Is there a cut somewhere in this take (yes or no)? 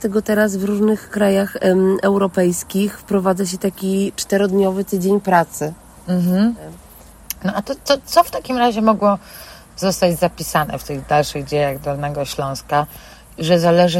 no